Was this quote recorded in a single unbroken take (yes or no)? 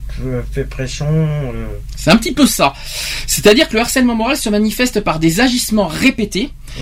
yes